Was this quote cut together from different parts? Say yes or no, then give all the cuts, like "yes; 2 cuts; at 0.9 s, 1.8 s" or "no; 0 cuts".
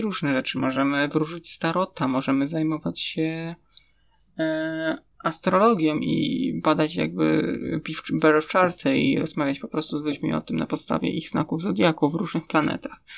no; 0 cuts